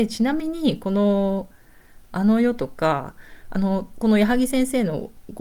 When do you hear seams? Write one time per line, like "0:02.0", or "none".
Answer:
none